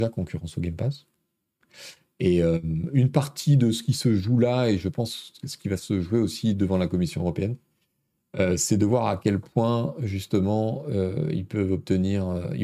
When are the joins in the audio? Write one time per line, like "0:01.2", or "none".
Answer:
none

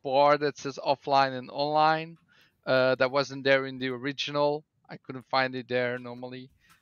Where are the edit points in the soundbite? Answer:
none

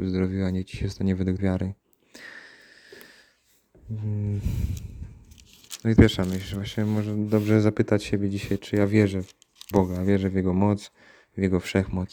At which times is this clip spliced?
0:01.4
0:06.0
0:09.7

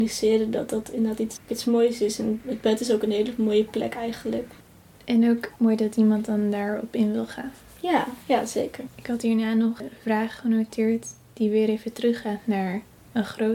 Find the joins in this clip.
none

